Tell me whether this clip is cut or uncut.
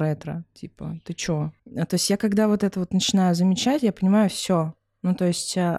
cut